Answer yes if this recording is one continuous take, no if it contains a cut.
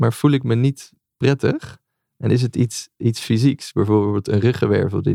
yes